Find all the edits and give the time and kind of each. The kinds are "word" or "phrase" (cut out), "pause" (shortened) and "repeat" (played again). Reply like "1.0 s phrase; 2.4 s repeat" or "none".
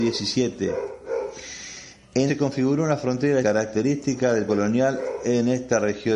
2.3 s word; 3.4 s word; 4.5 s word